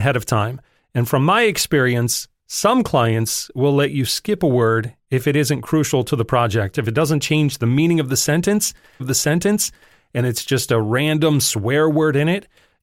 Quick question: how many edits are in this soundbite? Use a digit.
1